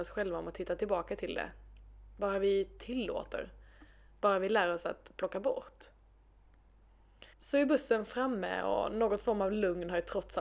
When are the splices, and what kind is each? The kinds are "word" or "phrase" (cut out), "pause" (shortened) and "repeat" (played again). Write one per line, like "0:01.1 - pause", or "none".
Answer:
0:07.3 - pause